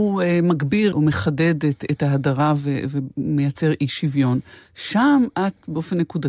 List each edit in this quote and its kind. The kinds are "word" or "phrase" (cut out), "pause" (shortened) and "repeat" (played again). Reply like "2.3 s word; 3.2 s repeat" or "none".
none